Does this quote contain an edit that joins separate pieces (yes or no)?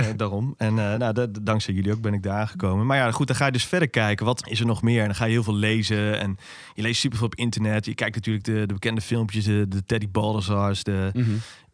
no